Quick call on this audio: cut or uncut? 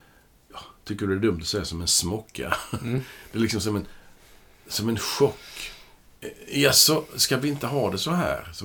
uncut